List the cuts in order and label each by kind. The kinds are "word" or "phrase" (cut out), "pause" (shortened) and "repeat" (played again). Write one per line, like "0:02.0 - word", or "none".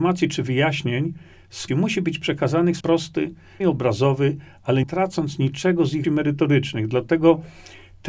0:01.7 - word
0:02.8 - word
0:03.6 - word
0:04.8 - word
0:06.0 - word